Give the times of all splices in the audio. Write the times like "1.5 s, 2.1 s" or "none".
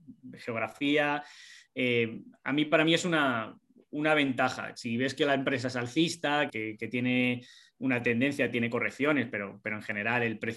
6.5 s